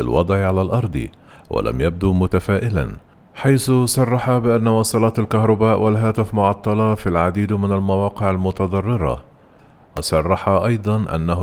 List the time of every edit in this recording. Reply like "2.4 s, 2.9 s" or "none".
none